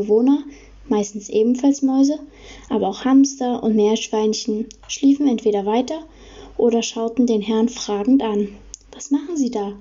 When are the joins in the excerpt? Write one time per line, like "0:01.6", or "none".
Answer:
0:08.8